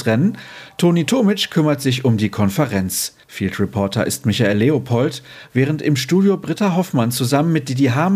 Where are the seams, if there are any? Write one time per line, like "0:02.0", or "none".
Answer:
0:03.2

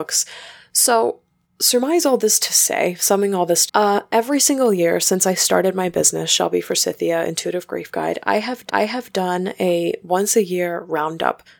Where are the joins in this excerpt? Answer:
0:01.4
0:03.7
0:08.7

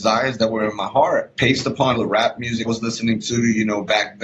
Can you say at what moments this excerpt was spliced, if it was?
0:01.4
0:01.9
0:02.6

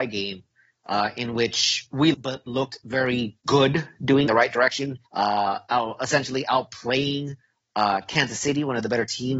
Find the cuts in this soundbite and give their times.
0:02.1
0:03.4
0:04.3
0:05.1

